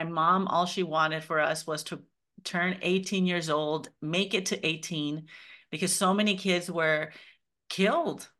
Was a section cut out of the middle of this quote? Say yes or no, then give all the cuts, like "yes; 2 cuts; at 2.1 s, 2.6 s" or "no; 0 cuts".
no; 0 cuts